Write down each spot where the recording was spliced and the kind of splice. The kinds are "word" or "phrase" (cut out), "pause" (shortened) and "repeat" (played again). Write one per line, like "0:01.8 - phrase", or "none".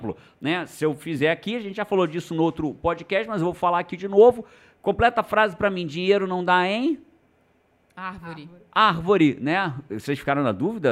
none